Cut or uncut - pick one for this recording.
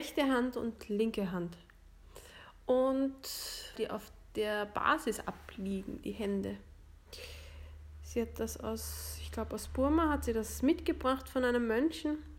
cut